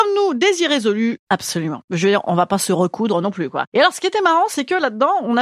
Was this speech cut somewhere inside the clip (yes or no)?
no